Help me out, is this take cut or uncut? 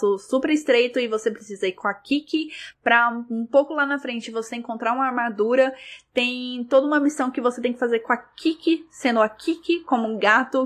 uncut